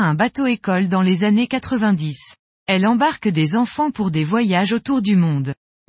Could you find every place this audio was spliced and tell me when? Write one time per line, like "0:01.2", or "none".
0:02.5